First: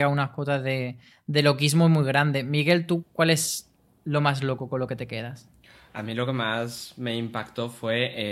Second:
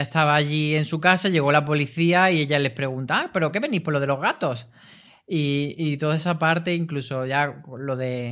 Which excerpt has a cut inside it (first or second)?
first